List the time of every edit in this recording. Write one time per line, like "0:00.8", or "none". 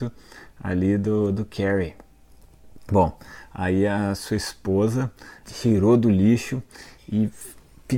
0:05.4